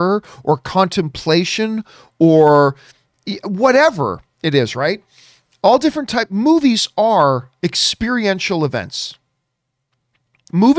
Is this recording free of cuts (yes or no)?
yes